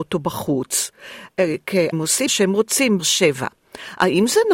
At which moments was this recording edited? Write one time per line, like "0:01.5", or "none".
0:01.9
0:02.3
0:03.0